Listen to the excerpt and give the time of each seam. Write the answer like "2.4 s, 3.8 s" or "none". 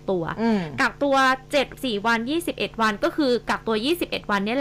1.7 s